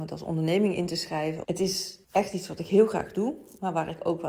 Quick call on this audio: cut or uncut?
uncut